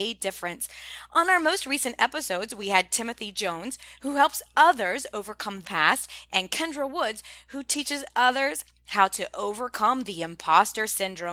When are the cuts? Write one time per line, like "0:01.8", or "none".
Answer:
0:05.6